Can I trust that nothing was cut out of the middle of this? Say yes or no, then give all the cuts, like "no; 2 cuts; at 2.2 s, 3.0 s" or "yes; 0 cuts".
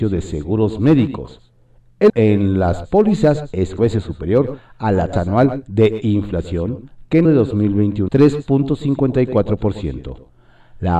no; 5 cuts; at 2.1 s, 3.8 s, 5.1 s, 7.2 s, 8.1 s